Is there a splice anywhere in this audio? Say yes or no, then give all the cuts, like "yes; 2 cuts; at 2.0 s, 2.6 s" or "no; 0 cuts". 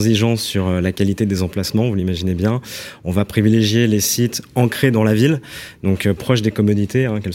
no; 0 cuts